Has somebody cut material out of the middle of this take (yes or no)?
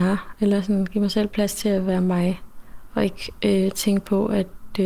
no